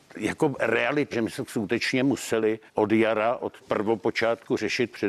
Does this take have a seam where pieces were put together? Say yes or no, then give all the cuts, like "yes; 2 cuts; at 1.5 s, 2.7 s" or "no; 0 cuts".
yes; 3 cuts; at 1.1 s, 2.7 s, 3.6 s